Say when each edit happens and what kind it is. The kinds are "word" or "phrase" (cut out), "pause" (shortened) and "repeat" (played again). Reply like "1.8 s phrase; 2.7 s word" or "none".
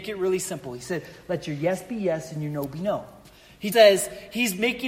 3.7 s word